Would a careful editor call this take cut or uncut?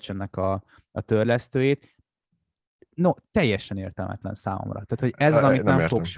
uncut